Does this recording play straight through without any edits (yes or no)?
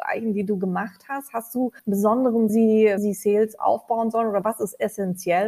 no